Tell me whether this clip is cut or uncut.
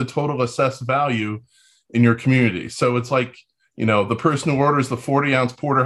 uncut